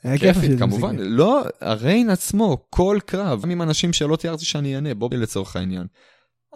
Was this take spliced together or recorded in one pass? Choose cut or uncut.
cut